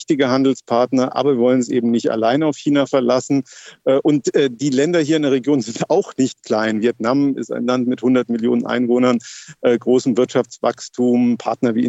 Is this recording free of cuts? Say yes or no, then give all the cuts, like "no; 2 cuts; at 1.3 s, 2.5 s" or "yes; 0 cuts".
yes; 0 cuts